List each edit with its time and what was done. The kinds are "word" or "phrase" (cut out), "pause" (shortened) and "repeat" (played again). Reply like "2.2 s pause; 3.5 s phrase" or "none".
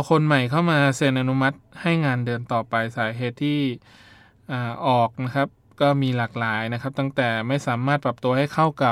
none